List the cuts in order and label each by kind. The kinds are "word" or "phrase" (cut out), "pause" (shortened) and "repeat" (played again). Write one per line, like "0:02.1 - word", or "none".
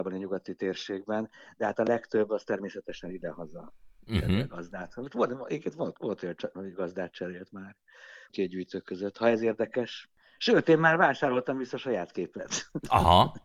0:08.3 - phrase

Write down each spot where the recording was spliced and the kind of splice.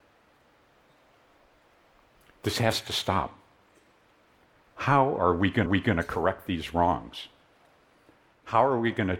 0:05.7 - repeat

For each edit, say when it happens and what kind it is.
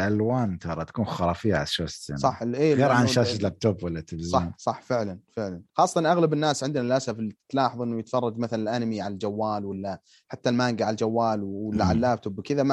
0:05.7 - pause

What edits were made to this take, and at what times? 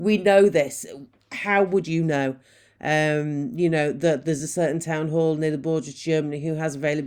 none

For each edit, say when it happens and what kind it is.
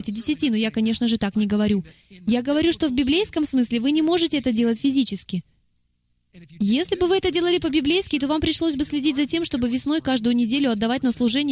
none

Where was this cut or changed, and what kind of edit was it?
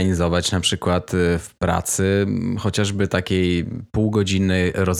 none

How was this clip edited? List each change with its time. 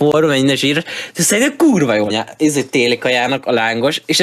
0:02.1 - word

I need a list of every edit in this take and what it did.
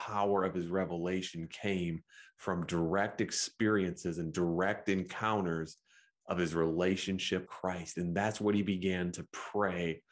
0:07.5 - word

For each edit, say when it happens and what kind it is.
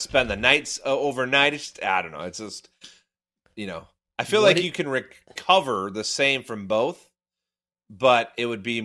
none

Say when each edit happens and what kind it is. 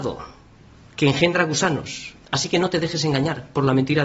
0:02.2 - pause

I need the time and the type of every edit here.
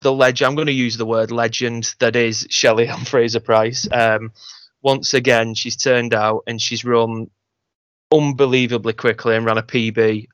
none

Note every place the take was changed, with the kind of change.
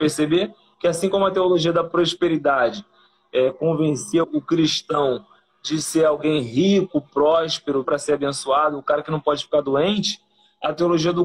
0:04.2 - word
0:07.8 - word

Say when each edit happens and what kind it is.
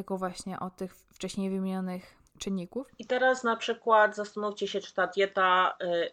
0:02.3 - pause

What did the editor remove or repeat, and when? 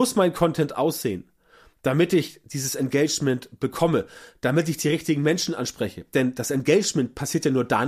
none

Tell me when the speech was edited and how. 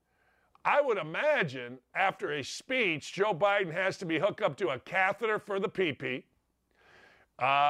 none

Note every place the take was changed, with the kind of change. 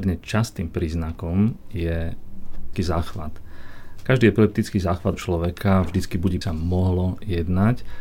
0:02.7 - word
0:05.1 - word
0:06.4 - phrase

